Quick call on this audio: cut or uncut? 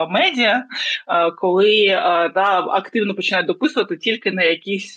uncut